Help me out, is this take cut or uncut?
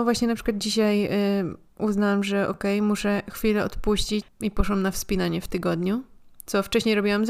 cut